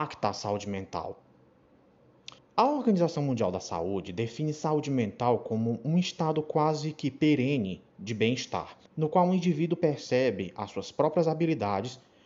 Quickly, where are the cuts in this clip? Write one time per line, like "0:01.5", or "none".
0:02.4
0:08.9